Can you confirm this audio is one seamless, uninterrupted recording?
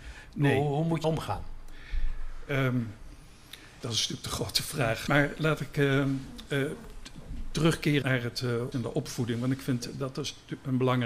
no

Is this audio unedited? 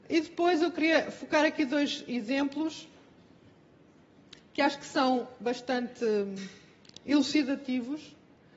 yes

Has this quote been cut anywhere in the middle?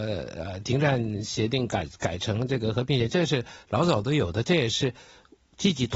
no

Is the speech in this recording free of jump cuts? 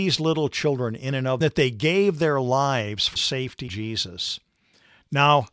no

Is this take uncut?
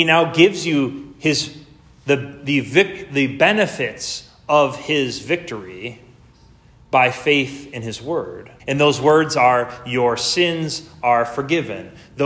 no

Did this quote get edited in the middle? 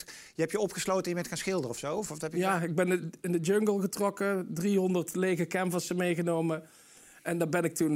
no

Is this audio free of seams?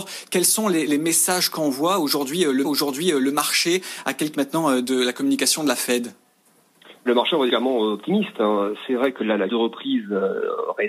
no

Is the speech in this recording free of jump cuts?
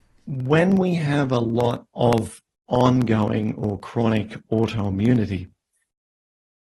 yes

